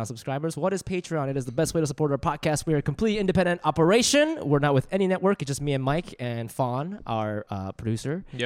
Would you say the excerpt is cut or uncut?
uncut